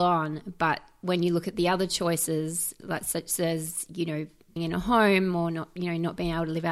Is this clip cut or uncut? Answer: cut